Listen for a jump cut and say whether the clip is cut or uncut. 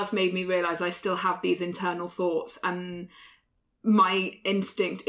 uncut